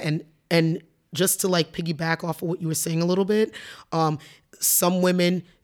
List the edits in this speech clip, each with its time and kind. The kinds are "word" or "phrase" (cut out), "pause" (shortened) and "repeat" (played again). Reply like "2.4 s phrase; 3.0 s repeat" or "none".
none

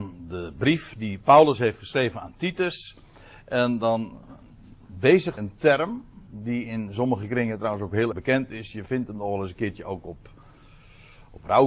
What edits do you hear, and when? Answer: 5.4 s word; 8.1 s word

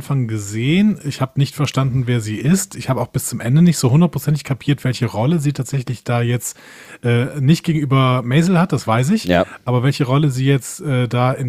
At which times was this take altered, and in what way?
none

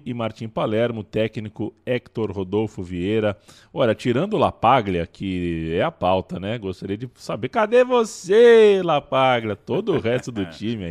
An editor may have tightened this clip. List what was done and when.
none

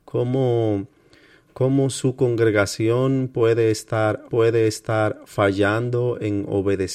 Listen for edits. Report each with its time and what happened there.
4.3 s repeat

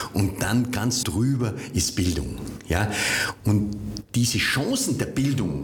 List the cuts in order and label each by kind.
1.0 s phrase

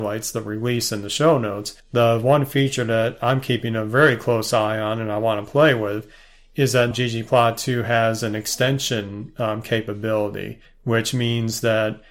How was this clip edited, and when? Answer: 1.8 s pause; 6.9 s word; 10.7 s pause

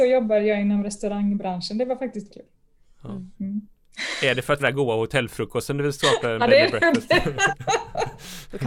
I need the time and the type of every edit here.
2.3 s word; 3.3 s pause; 4.6 s phrase

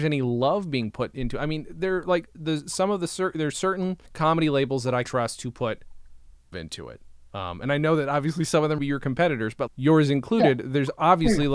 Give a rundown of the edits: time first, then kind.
2.3 s word; 4.1 s pause; 5.0 s word; 6.5 s word; 8.8 s phrase; 9.7 s word

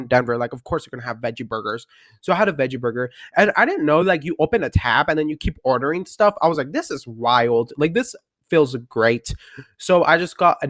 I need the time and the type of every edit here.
none

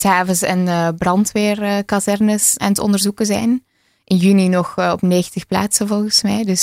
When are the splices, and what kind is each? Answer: 2.6 s word

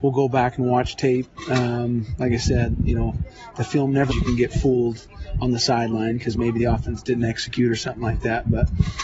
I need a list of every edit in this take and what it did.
4.1 s phrase

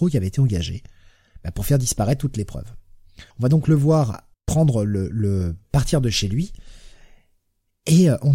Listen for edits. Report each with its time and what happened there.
3.3 s pause; 4.3 s pause

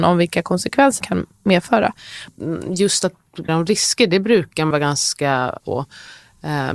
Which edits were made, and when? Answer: 1.0 s word; 3.5 s word; 4.7 s word; 5.6 s word

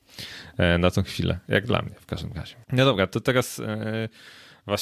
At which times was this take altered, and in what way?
2.6 s pause

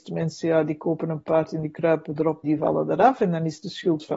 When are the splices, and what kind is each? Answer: 2.4 s word

